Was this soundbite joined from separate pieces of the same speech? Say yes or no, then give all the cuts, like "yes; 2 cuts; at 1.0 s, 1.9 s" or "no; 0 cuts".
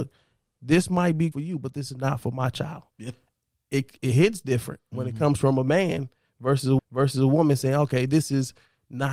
yes; 4 cuts; at 1.3 s, 2.9 s, 4.0 s, 6.8 s